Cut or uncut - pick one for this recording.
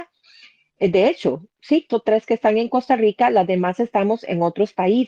cut